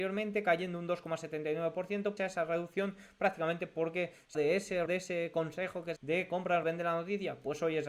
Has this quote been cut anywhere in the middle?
yes; 5 cuts; at 2.2 s, 4.3 s, 4.9 s, 6.0 s, 6.6 s

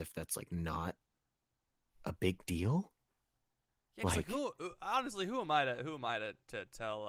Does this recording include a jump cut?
no; 0 cuts

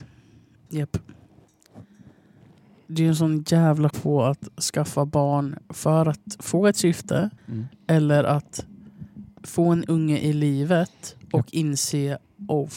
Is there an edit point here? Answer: yes; 4 cuts; at 2.9 s, 3.9 s, 5.6 s, 7.4 s

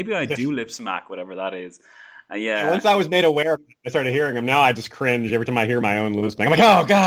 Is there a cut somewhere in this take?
no; 0 cuts

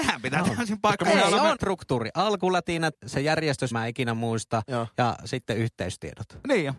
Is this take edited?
yes; 3 cuts; at 1.6 s, 2.9 s, 3.7 s

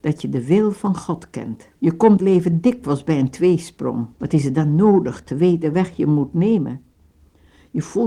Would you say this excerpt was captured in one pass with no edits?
no; 4 cuts; at 1.8 s, 2.2 s, 4.1 s, 5.7 s

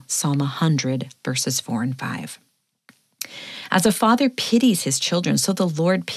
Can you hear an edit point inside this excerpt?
no; 0 cuts

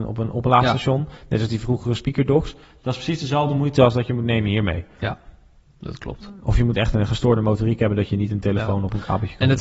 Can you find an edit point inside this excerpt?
no; 0 cuts

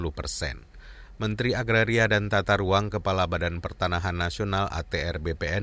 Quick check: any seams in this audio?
no; 0 cuts

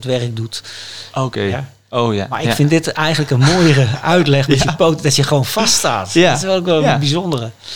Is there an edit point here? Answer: no; 0 cuts

